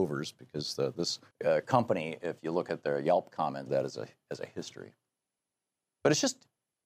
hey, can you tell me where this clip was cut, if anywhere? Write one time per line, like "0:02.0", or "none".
0:01.3
0:03.7